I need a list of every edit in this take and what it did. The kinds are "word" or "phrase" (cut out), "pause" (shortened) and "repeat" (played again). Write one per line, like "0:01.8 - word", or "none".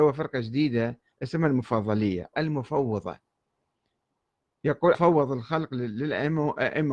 0:01.1 - pause
0:02.3 - word
0:04.9 - word